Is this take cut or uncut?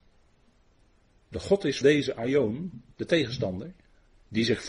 cut